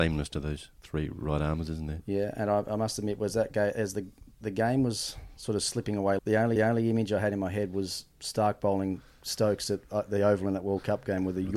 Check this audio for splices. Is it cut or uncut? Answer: cut